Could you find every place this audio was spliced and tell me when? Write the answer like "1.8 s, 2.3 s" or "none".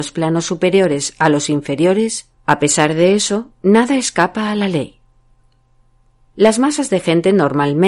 none